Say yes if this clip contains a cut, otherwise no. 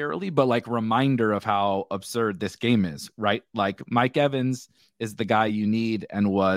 no